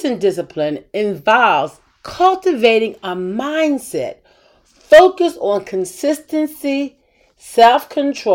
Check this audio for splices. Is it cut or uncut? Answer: uncut